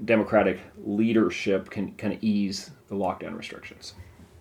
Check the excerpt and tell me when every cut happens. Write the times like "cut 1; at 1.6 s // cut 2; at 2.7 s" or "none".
cut 1; at 2.8 s